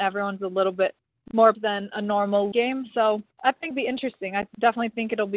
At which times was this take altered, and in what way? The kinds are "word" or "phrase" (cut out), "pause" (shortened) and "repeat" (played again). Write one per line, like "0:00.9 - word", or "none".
0:01.5 - word
0:02.5 - word
0:03.3 - pause
0:03.7 - word